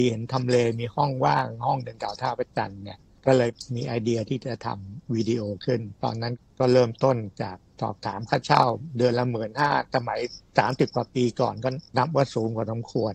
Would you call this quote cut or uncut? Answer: cut